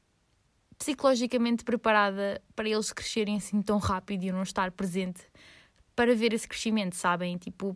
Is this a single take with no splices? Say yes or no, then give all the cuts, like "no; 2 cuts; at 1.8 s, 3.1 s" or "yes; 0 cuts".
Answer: yes; 0 cuts